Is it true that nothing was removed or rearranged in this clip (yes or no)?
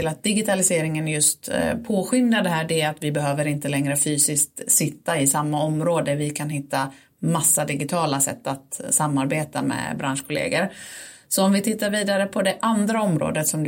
yes